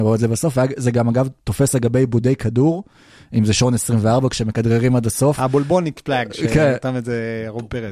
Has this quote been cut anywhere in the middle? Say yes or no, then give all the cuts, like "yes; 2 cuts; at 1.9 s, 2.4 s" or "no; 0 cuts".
no; 0 cuts